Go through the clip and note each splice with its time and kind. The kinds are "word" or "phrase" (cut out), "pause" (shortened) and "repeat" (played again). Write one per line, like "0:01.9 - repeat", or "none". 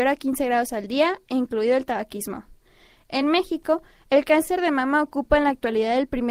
none